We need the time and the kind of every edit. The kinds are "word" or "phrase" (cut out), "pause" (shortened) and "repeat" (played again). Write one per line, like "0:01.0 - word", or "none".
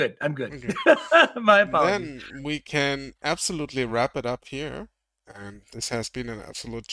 none